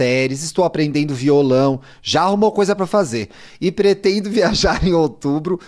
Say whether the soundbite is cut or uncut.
uncut